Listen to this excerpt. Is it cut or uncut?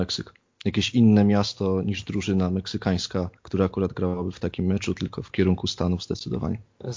cut